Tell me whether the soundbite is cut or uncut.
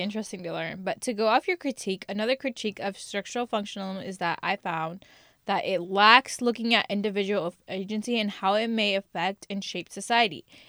uncut